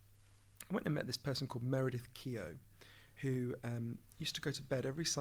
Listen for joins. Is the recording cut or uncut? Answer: uncut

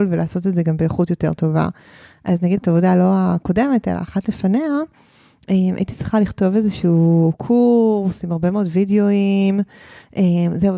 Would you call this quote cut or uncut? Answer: cut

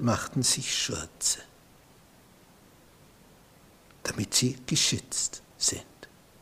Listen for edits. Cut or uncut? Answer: uncut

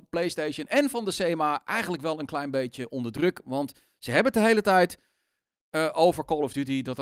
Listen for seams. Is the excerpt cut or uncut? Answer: uncut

